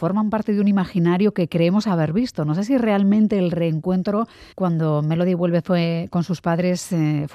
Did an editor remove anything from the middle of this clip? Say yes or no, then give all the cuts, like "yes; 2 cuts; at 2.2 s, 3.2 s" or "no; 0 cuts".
yes; 1 cut; at 4.5 s